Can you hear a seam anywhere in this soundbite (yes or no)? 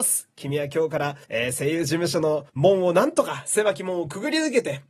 yes